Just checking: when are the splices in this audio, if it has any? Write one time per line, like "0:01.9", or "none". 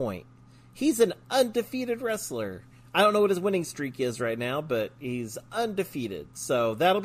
none